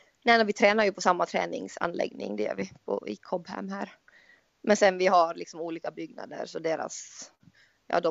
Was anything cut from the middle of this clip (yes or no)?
no